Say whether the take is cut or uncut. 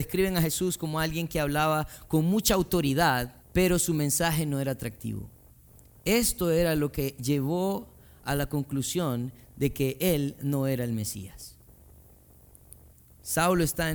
cut